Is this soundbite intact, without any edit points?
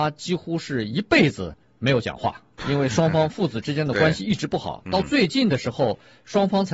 no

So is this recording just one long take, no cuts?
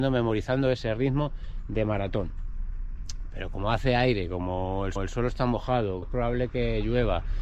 no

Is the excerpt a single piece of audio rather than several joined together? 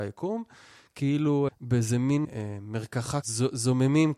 no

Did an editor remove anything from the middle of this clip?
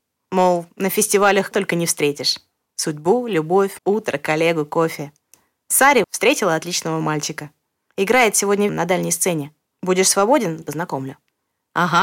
yes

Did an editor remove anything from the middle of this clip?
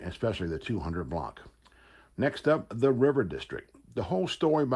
no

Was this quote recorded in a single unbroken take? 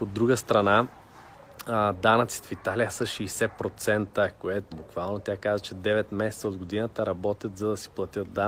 no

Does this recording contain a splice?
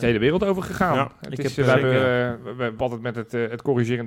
yes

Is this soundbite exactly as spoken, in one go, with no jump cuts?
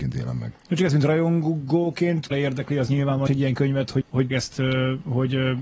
no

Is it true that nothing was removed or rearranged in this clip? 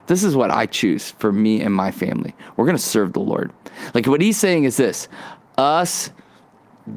yes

